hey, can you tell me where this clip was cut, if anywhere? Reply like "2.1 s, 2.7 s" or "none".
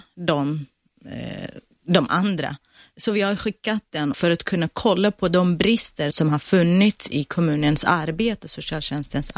4.1 s, 6.1 s

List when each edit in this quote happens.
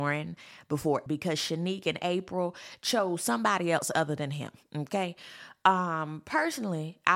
1.1 s

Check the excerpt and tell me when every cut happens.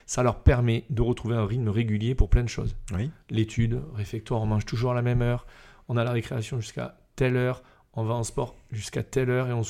none

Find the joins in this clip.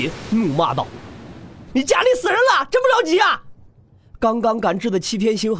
3.7 s

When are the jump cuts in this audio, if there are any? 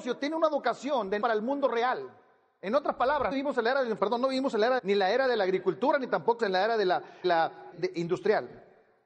1.2 s, 3.3 s, 4.0 s, 4.8 s, 6.4 s, 7.2 s, 7.7 s

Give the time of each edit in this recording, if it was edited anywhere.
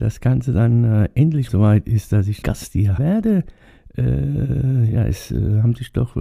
1.5 s, 2.4 s, 3.0 s

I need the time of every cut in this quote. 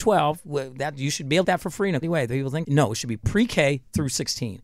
1.4 s, 2.0 s, 2.6 s

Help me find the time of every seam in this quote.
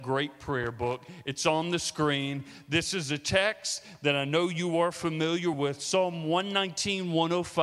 none

